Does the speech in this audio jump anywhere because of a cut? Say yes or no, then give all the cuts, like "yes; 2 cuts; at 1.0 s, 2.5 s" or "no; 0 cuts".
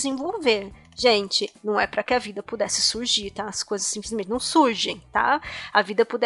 no; 0 cuts